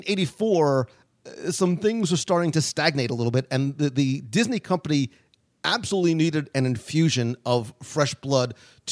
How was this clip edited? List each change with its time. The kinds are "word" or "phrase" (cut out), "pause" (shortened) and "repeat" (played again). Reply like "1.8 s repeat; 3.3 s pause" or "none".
none